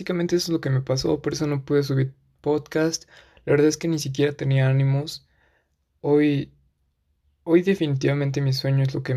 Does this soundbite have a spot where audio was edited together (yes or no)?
no